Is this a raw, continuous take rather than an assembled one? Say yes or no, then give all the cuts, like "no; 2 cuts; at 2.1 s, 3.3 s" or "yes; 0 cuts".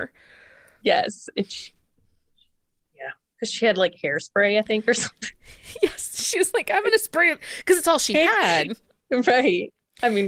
yes; 0 cuts